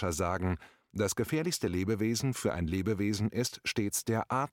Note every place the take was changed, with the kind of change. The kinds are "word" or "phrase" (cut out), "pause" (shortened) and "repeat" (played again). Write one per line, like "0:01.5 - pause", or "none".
none